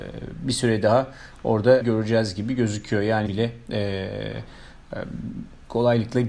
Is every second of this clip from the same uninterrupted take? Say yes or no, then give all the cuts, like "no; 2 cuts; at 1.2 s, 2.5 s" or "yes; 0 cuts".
no; 2 cuts; at 1.8 s, 3.3 s